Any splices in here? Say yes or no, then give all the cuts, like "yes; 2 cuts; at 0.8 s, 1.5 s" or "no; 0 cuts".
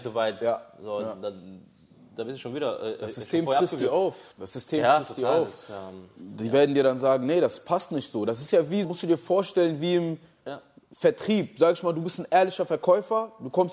yes; 2 cuts; at 4.3 s, 8.8 s